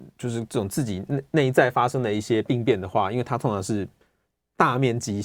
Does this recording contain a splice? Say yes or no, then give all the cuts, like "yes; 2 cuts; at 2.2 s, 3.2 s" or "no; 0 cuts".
no; 0 cuts